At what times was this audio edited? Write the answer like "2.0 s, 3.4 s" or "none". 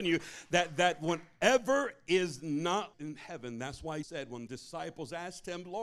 2.9 s, 4.0 s, 4.5 s